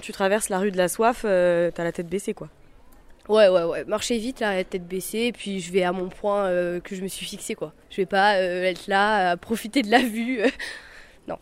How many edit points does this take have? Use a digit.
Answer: 2